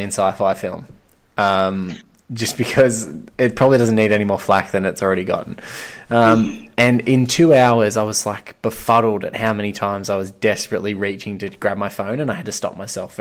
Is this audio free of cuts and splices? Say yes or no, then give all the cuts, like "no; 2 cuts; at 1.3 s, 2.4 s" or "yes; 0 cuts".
yes; 0 cuts